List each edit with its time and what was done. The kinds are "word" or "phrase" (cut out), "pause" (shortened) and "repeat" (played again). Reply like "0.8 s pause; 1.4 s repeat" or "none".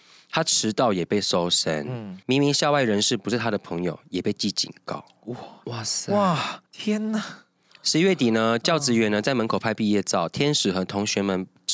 2.2 s pause; 6.7 s pause; 7.7 s pause